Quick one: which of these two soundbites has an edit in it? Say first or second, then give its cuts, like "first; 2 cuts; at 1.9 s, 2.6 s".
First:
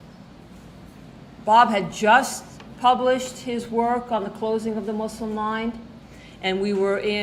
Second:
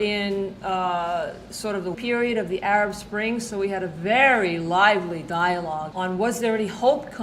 second; 2 cuts; at 1.9 s, 5.9 s